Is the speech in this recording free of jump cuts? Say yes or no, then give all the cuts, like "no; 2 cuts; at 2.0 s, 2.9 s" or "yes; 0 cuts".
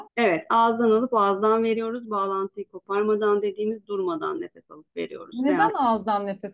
yes; 0 cuts